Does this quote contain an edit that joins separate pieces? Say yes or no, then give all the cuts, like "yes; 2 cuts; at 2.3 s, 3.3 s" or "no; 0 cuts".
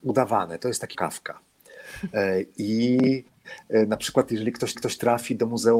yes; 2 cuts; at 0.9 s, 4.7 s